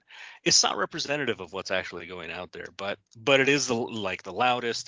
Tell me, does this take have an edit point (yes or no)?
no